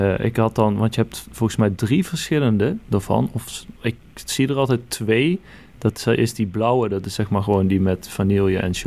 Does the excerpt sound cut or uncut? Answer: uncut